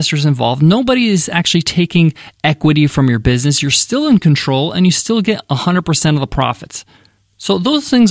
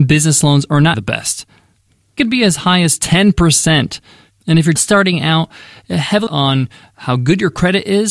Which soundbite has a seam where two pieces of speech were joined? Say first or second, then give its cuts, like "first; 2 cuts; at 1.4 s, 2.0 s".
second; 4 cuts; at 0.9 s, 2.2 s, 4.8 s, 6.3 s